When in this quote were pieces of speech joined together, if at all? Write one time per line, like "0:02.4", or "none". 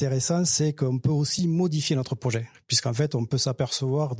none

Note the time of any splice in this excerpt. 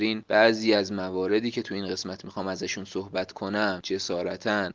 none

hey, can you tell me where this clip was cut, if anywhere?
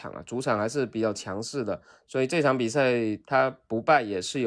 none

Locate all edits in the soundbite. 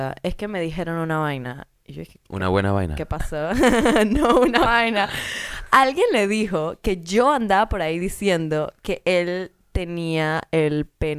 0:02.2
0:04.7

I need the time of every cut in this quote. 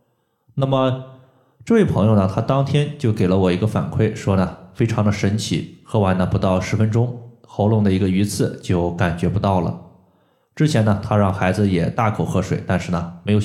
none

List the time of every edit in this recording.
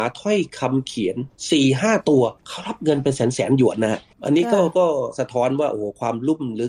0:02.4

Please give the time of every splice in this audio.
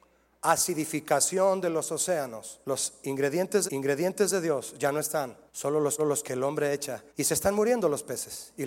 0:02.6
0:03.7
0:05.5
0:06.0
0:07.1

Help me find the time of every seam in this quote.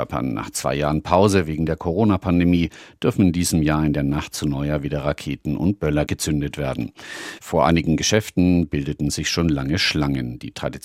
none

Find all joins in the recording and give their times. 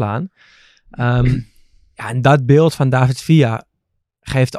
none

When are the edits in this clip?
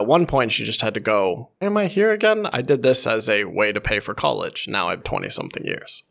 0:01.6
0:05.0

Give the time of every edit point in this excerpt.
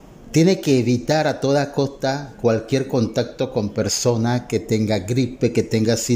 none

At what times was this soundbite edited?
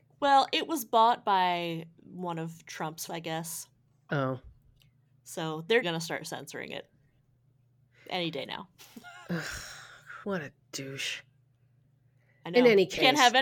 0:03.1
0:05.8
0:10.2

